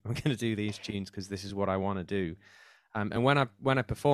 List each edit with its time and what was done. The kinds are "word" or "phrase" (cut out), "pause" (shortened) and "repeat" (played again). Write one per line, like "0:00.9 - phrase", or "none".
none